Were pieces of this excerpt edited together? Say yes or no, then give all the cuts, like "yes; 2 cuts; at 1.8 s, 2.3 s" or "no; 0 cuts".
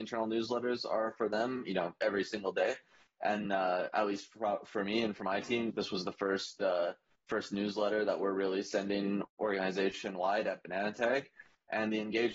yes; 2 cuts; at 3.4 s, 5.7 s